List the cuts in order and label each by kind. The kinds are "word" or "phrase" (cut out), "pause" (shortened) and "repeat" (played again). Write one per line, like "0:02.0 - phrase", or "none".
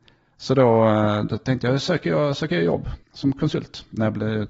0:03.0 - pause